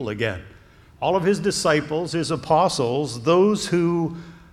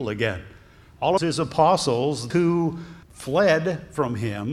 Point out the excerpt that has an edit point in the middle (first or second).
second